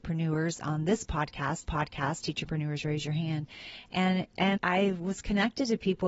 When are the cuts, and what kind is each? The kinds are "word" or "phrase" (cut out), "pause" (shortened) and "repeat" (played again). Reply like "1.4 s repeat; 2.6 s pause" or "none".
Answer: 1.6 s repeat; 4.6 s word